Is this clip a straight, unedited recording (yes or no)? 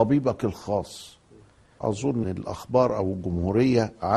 no